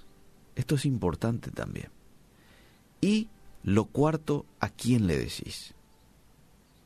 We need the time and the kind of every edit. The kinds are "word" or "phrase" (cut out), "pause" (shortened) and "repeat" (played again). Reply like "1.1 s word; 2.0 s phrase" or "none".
none